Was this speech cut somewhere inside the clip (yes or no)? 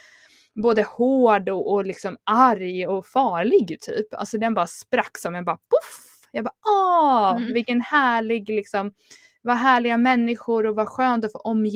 no